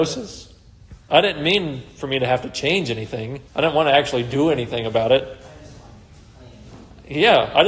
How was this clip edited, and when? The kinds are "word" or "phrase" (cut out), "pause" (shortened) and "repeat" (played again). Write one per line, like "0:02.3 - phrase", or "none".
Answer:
0:03.5 - pause